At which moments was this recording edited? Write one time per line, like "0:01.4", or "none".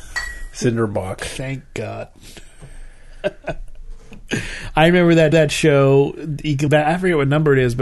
0:05.3
0:06.7